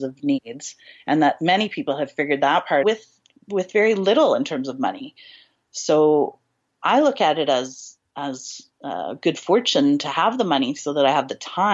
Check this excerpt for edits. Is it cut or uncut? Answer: cut